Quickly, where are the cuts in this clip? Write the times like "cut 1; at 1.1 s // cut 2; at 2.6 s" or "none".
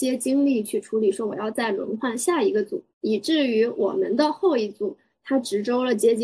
cut 1; at 2.9 s